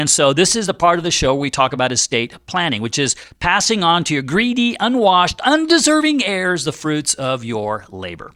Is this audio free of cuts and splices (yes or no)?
yes